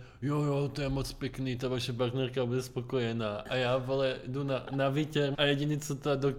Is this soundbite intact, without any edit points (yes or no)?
no